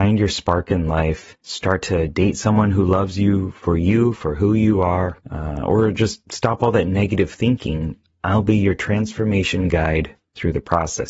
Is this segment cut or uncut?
cut